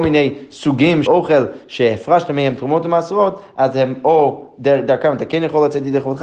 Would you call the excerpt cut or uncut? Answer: cut